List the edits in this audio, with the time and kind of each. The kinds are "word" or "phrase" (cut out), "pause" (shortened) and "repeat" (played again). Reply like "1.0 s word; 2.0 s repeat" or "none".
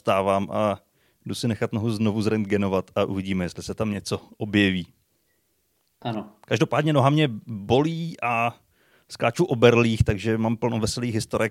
none